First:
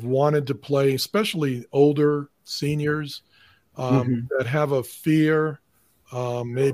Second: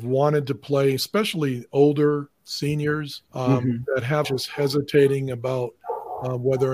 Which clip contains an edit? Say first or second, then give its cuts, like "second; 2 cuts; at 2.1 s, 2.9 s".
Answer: second; 2 cuts; at 3.3 s, 4.2 s